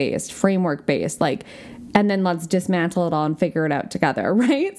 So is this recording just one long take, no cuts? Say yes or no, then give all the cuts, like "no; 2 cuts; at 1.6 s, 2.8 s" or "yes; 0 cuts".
yes; 0 cuts